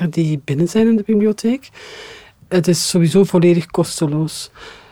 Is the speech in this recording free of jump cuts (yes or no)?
yes